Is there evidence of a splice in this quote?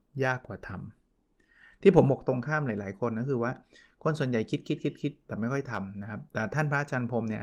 no; 0 cuts

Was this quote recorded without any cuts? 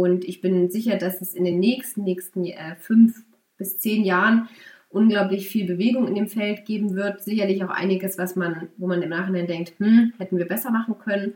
yes; 0 cuts

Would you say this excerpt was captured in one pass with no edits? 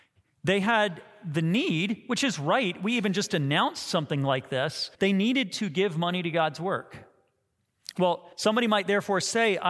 no; 2 cuts; at 4.9 s, 8.3 s

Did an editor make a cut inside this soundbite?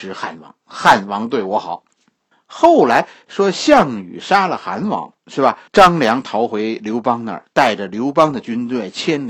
yes; 3 cuts; at 2.3 s, 5.2 s, 5.7 s

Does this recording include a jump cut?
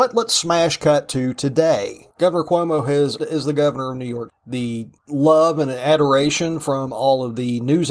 yes; 3 cuts; at 2.1 s, 3.2 s, 4.3 s

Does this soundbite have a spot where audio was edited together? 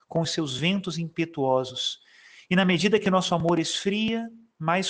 no; 0 cuts

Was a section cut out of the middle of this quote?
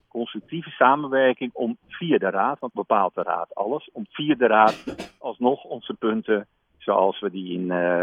yes; 1 cut; at 2.7 s

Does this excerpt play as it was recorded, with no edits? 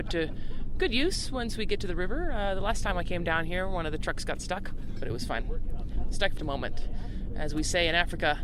no; 1 cut; at 6.4 s

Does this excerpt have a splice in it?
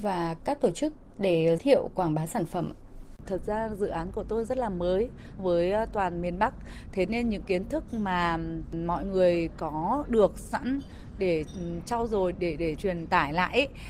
yes; 4 cuts; at 1.6 s, 5.4 s, 12.3 s, 12.8 s

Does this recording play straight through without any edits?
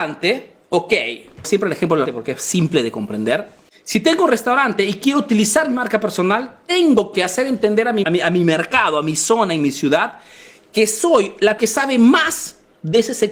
no; 4 cuts; at 1.4 s, 2.1 s, 8.0 s, 11.6 s

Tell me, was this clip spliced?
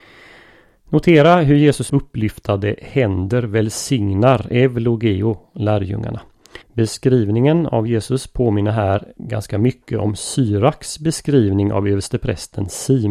yes; 3 cuts; at 1.9 s, 6.6 s, 9.2 s

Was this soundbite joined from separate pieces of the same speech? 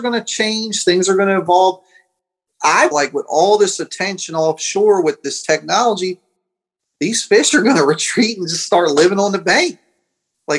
yes; 1 cut; at 2.9 s

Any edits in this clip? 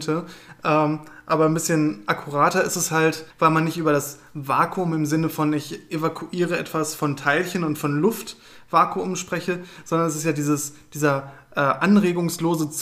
yes; 1 cut; at 3.3 s

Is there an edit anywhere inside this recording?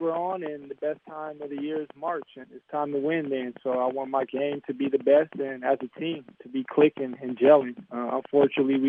yes; 2 cuts; at 2.4 s, 6.3 s

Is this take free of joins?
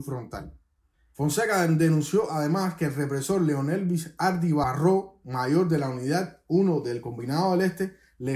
yes; 0 cuts

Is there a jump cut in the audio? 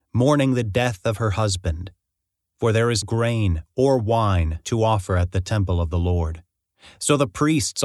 yes; 1 cut; at 3.0 s

